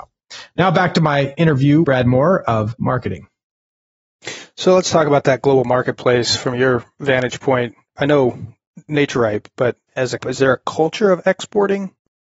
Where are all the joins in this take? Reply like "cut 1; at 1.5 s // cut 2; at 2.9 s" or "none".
cut 1; at 1.8 s // cut 2; at 2.8 s // cut 3; at 10.2 s